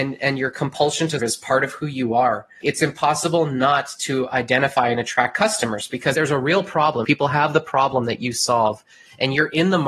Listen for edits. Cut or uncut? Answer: cut